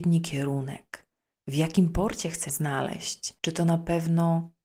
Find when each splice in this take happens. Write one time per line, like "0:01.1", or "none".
0:02.5
0:03.4